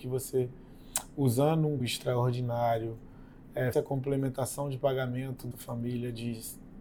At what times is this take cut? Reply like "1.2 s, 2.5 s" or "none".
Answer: 1.8 s, 3.7 s, 5.5 s